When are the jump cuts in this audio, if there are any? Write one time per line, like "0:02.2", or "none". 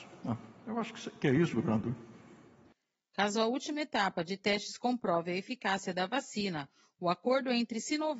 none